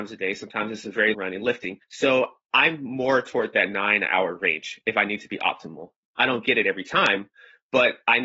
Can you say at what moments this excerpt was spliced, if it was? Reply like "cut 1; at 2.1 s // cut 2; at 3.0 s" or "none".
cut 1; at 1.1 s // cut 2; at 1.8 s